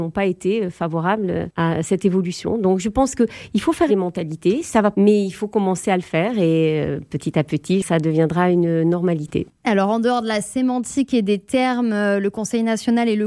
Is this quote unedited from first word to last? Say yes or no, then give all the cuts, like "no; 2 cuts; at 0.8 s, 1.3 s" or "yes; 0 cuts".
no; 2 cuts; at 3.9 s, 4.9 s